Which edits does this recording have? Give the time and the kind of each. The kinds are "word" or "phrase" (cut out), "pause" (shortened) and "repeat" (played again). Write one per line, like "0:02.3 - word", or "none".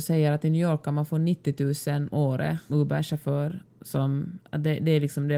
0:02.1 - word
0:02.7 - word